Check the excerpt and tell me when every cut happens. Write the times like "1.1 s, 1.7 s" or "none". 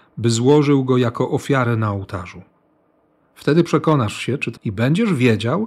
4.6 s